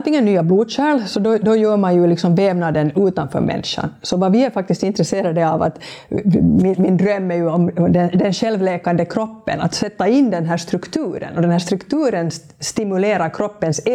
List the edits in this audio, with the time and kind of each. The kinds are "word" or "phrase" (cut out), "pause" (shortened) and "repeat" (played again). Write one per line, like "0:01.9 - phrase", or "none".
none

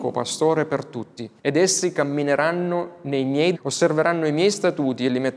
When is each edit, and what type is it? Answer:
0:01.4 - pause
0:03.5 - word

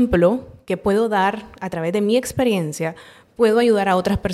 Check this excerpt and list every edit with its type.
none

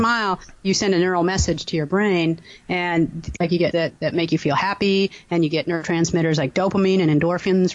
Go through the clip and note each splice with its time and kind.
0:03.7 - word

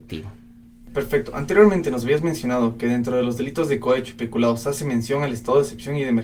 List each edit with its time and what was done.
none

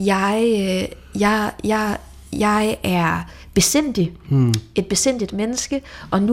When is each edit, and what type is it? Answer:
none

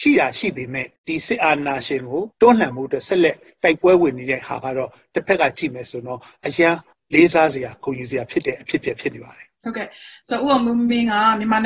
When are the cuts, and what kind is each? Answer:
0:01.0 - pause
0:02.3 - pause
0:06.9 - pause
0:09.6 - pause

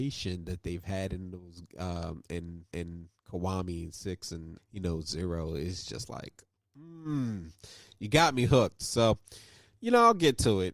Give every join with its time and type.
0:02.7 - repeat
0:04.6 - word

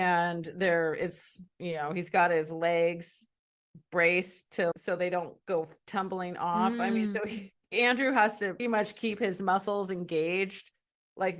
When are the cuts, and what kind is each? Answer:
0:01.5 - pause
0:04.7 - word
0:08.6 - word

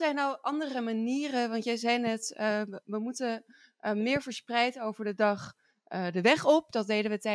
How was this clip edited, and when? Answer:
none

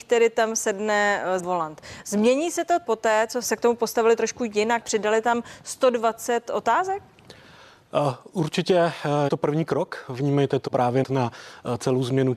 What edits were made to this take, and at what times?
0:01.4 - word
0:02.8 - word
0:03.4 - word
0:04.8 - word
0:09.3 - word
0:10.7 - word
0:11.0 - word

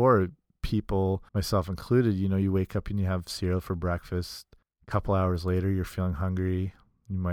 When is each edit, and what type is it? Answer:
0:01.3 - pause
0:04.6 - pause

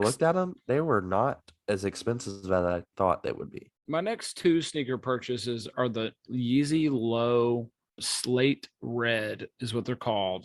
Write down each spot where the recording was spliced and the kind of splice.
0:03.8 - pause
0:08.0 - word

